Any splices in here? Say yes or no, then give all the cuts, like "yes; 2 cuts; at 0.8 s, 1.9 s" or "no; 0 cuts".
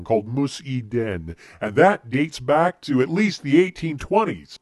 no; 0 cuts